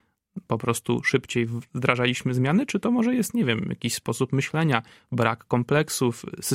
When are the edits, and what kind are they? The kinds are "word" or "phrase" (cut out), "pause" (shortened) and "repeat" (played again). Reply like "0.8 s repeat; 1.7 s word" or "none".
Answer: none